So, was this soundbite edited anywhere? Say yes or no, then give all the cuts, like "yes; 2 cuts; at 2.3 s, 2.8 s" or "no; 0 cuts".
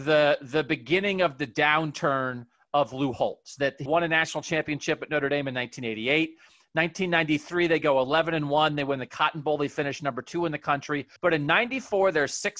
yes; 2 cuts; at 3.9 s, 11.2 s